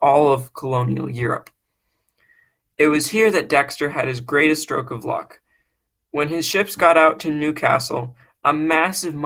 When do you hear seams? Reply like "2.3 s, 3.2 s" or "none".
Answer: none